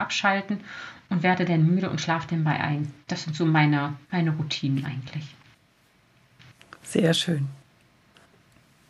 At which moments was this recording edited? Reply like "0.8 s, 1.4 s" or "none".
3.0 s, 4.0 s